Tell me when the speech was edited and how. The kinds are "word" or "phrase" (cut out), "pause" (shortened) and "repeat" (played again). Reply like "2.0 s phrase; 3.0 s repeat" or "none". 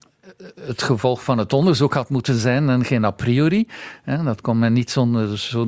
none

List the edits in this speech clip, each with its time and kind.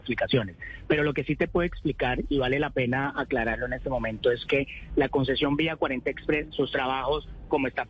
6.5 s word

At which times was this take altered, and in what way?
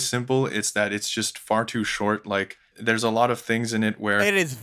2.7 s word

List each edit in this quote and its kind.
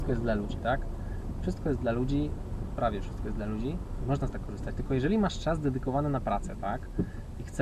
4.3 s word

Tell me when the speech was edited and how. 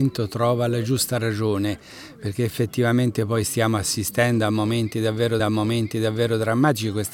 5.4 s repeat

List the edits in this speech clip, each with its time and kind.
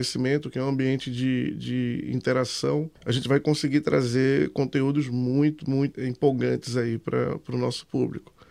3.0 s pause; 5.9 s word

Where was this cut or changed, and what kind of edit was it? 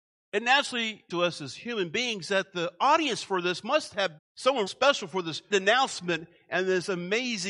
1.1 s word; 4.2 s word; 4.7 s word; 5.5 s word

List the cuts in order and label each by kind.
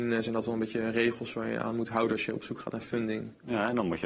none

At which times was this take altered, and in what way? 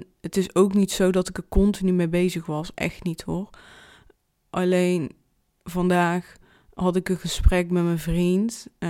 none

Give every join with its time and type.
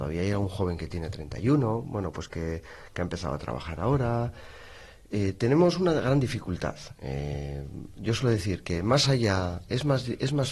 none

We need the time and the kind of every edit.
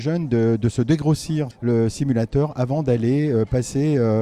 1.5 s word

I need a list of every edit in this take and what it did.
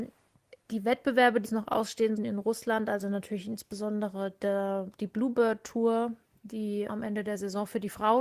1.4 s word; 2.2 s word; 6.9 s word

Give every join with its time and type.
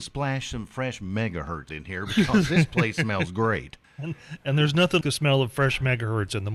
1.7 s word; 5.0 s word

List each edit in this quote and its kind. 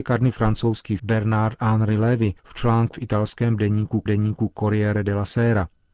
1.0 s word; 2.4 s pause; 2.9 s word; 4.1 s repeat

